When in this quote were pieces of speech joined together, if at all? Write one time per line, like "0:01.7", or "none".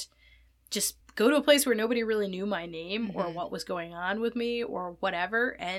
0:01.0